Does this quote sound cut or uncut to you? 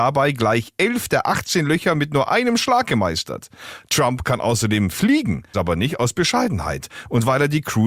cut